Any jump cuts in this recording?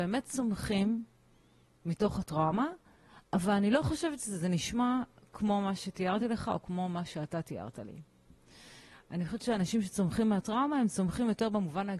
no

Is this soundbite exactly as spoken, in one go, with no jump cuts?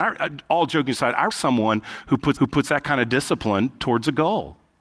no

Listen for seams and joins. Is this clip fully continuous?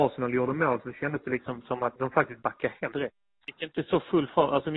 no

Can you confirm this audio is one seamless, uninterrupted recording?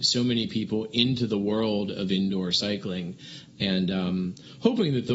yes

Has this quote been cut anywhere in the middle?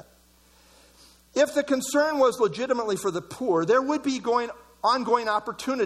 no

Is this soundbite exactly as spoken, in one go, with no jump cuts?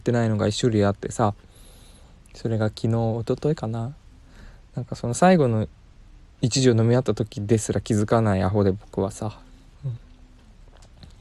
yes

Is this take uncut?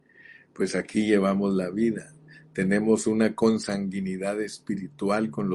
yes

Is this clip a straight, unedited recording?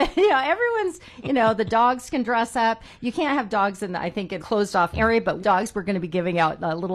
no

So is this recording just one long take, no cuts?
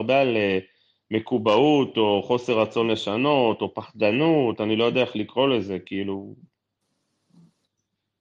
yes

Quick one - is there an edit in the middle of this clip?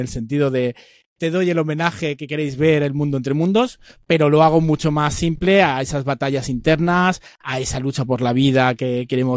no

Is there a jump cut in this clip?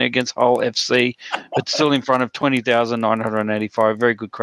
no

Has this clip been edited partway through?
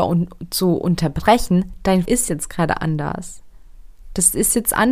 yes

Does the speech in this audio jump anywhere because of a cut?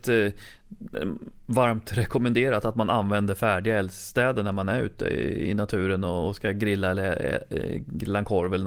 no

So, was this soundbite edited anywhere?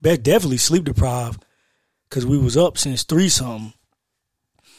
no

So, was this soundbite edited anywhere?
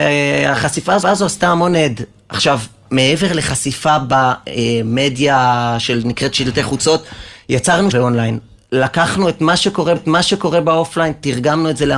yes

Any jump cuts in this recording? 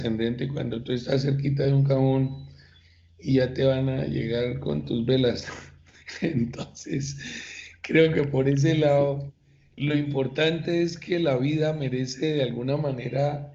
no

